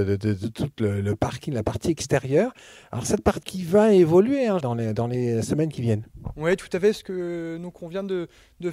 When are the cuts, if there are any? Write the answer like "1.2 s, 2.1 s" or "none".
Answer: 3.4 s, 4.6 s